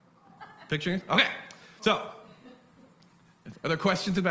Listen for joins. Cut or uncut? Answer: uncut